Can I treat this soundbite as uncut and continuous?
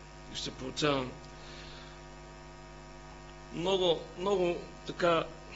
yes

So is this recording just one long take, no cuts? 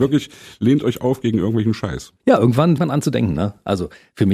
no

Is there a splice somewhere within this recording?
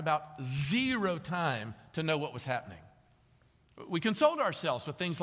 no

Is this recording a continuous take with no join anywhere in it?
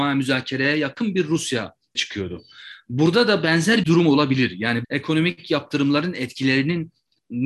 no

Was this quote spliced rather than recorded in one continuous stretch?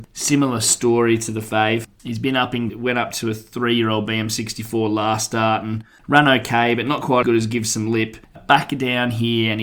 yes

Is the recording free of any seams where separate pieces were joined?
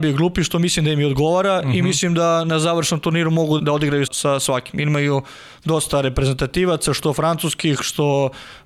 no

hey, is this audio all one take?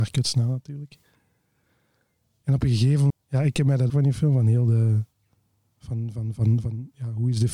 no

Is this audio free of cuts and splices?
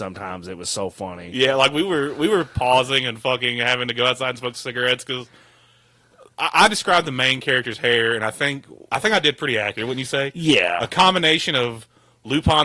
no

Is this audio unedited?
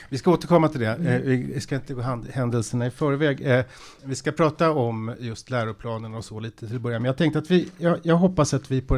yes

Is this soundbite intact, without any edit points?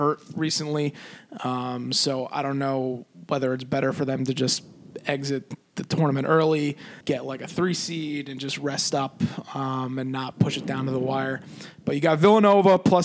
no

